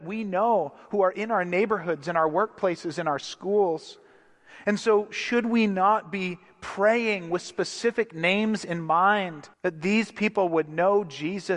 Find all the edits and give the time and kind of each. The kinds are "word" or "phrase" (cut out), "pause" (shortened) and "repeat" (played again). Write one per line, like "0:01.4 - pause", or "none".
0:09.5 - pause